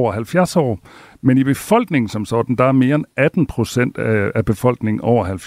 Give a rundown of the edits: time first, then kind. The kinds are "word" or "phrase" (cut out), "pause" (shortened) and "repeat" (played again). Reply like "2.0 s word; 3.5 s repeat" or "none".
none